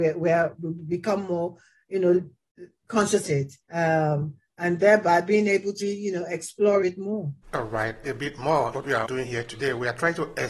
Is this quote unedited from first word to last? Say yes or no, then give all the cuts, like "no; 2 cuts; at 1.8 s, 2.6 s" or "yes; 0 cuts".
no; 9 cuts; at 2.8 s, 3.2 s, 3.6 s, 5.8 s, 6.8 s, 7.4 s, 8.0 s, 8.7 s, 9.0 s